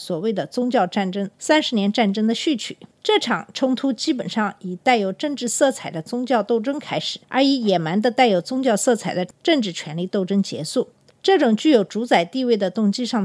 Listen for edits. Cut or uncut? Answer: cut